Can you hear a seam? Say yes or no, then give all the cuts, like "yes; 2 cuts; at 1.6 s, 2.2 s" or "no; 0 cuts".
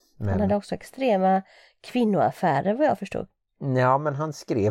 no; 0 cuts